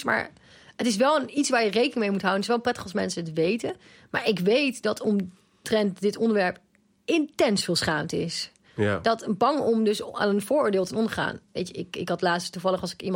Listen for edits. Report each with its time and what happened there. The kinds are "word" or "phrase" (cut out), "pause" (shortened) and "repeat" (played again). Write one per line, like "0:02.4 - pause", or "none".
none